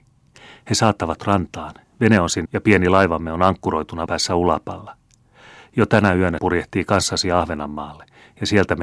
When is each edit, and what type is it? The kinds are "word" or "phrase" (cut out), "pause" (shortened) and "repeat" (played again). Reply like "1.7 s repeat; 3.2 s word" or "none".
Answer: 1.2 s word; 2.4 s word; 4.1 s word; 6.4 s word